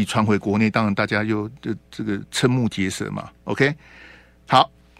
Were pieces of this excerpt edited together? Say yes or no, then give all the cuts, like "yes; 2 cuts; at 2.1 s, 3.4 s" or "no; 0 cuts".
no; 0 cuts